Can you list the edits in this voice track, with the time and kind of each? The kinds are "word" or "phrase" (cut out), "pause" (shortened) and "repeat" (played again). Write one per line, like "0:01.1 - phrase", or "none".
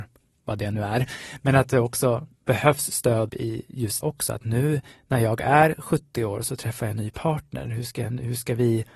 0:02.3 - pause
0:03.3 - phrase
0:04.0 - word